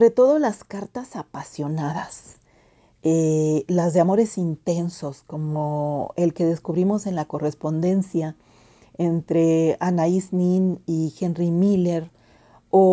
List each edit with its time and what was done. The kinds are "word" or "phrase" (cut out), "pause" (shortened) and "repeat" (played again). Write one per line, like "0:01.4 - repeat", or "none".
none